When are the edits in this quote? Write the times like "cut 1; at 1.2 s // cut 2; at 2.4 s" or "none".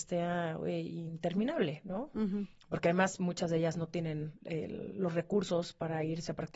cut 1; at 4.4 s